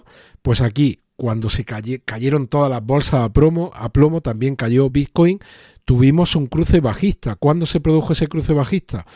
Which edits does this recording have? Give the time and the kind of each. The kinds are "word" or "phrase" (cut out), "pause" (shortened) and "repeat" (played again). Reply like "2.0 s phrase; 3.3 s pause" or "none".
none